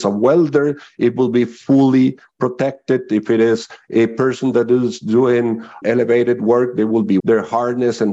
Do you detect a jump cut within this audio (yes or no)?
yes